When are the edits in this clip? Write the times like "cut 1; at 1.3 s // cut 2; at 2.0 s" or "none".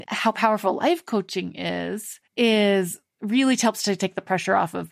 cut 1; at 2.3 s